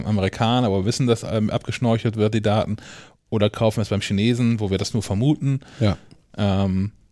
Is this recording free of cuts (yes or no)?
yes